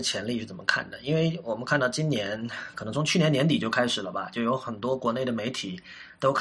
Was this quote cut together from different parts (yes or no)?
no